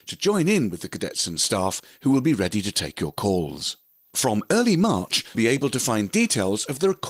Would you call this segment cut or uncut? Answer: cut